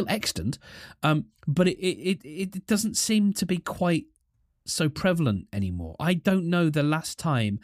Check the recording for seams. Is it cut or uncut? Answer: uncut